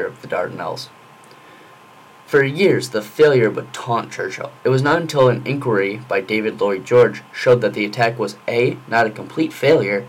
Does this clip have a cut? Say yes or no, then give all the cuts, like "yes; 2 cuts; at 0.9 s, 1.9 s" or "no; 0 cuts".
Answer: yes; 1 cut; at 4.6 s